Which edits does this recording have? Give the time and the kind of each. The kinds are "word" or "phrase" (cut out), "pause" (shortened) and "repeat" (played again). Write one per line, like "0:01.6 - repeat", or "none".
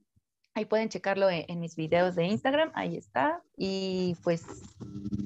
0:03.5 - pause